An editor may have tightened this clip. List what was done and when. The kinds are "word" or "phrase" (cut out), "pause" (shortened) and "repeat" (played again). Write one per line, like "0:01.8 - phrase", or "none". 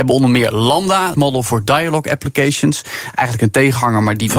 0:01.1 - word